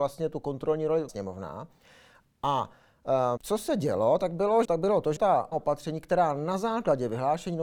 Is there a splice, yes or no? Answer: yes